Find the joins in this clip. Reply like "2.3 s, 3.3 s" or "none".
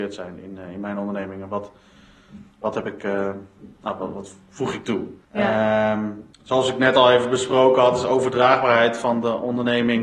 2.5 s, 5.2 s, 6.3 s